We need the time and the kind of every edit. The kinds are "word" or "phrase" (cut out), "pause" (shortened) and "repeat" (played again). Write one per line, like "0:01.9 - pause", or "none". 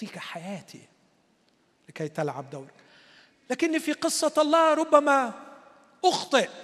none